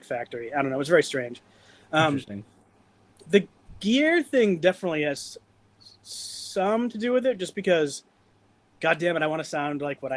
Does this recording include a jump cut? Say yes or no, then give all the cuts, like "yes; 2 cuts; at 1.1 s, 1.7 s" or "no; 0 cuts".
no; 0 cuts